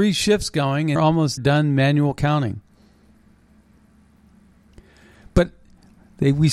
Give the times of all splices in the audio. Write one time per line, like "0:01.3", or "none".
0:01.0
0:01.4